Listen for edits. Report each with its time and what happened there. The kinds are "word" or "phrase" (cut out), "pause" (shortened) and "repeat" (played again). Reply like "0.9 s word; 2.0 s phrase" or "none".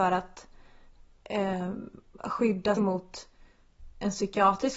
2.8 s word